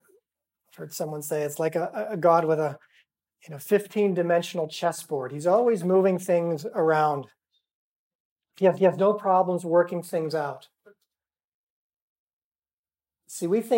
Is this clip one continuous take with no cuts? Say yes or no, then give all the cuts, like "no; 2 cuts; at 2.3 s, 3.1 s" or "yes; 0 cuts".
no; 1 cut; at 8.8 s